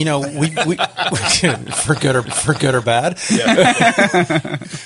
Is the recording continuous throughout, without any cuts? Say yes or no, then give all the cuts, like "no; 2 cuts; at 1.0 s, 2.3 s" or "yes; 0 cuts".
no; 1 cut; at 2.2 s